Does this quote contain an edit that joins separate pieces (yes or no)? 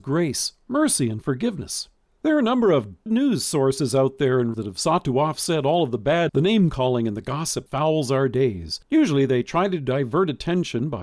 yes